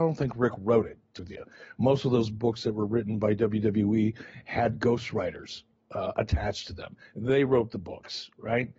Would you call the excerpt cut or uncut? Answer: cut